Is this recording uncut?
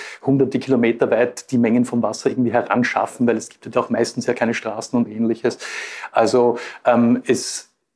yes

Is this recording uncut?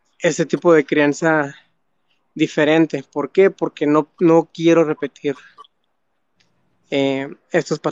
yes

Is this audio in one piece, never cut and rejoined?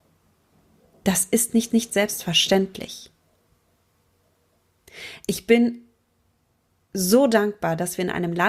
no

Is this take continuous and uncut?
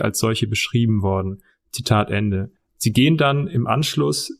no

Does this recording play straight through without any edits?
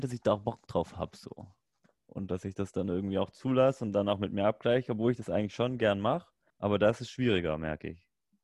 no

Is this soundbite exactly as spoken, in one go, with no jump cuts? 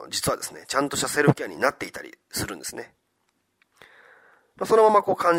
yes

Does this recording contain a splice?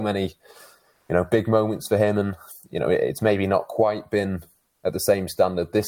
no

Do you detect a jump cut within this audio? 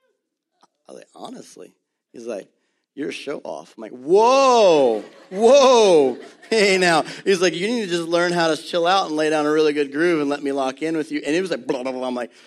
no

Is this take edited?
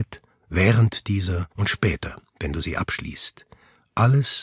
yes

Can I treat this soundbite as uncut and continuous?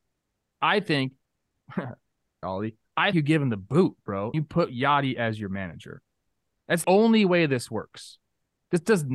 no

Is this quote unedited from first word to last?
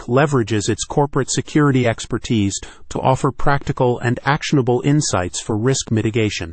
yes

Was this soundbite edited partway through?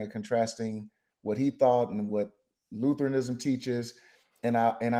no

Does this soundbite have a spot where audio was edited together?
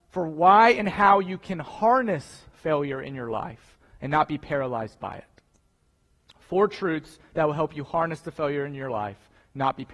no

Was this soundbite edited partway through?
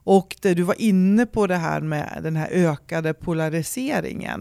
no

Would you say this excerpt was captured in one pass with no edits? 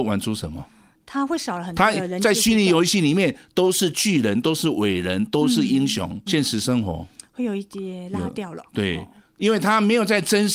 no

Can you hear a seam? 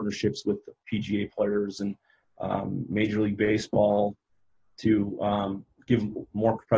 no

